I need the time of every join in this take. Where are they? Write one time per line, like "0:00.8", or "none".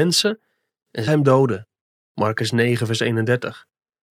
0:01.1